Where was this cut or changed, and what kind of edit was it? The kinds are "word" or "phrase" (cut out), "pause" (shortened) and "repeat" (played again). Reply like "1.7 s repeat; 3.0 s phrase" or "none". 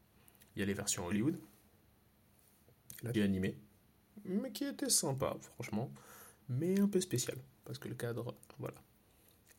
3.1 s word